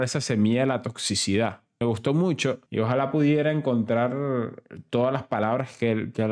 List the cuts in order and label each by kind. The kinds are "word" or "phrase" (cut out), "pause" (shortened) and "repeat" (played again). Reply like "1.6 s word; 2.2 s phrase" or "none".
1.8 s word; 2.7 s pause